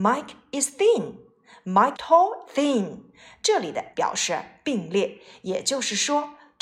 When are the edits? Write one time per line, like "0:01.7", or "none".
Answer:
0:01.9
0:02.4
0:03.9